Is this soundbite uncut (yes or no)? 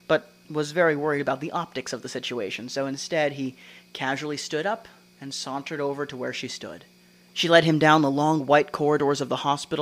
yes